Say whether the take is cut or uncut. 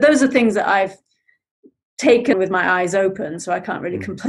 cut